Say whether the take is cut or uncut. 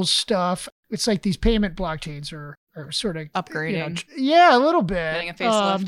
cut